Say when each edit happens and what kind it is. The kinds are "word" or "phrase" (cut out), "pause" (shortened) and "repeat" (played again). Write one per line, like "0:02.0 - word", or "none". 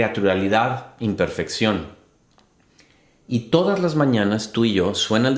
none

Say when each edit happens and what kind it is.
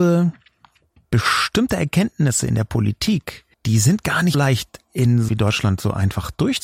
0:03.5 - pause
0:04.3 - word
0:05.3 - phrase

